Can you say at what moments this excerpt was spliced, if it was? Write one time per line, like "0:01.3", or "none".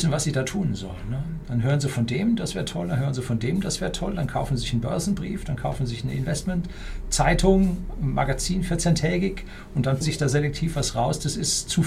0:10.0